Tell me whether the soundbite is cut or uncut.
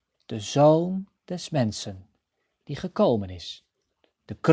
cut